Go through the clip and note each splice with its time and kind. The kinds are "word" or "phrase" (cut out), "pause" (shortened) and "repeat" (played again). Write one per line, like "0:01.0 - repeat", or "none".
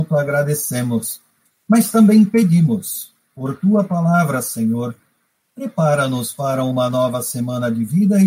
none